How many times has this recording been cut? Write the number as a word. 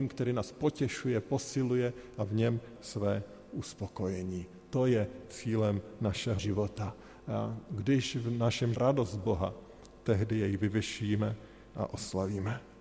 three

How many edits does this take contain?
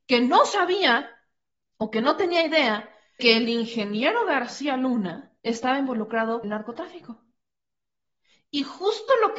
four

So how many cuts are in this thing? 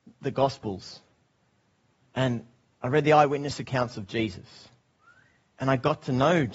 zero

